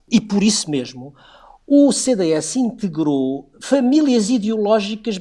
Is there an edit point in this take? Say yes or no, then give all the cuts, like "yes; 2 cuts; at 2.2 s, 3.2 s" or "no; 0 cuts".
no; 0 cuts